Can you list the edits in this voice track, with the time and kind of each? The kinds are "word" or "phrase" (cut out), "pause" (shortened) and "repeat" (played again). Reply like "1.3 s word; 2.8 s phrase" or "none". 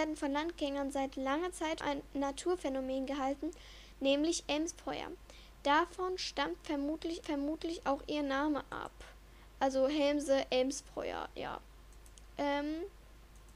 1.8 s word; 7.2 s repeat